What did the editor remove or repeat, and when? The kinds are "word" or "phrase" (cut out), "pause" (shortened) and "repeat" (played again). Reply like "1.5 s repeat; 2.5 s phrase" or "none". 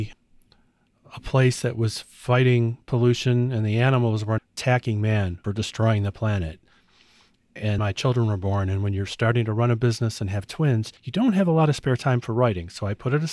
2.8 s pause; 4.4 s word; 5.4 s word; 7.8 s word; 11.0 s pause